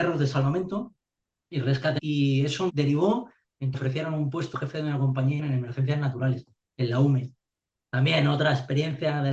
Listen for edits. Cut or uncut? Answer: cut